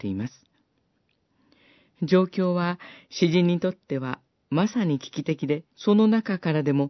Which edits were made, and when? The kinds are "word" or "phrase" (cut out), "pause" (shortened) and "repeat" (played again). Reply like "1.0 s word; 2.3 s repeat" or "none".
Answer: 5.7 s pause